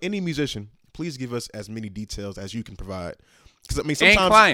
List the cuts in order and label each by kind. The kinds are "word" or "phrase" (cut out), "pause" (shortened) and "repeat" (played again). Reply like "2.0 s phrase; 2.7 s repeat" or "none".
none